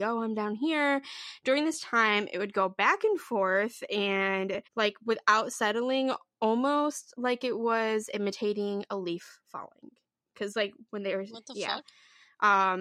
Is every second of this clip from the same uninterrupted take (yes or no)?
no